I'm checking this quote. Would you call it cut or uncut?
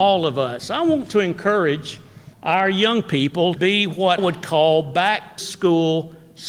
cut